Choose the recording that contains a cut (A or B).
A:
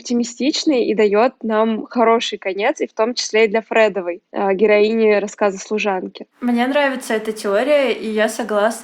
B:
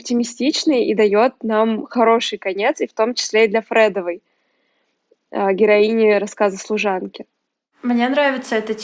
A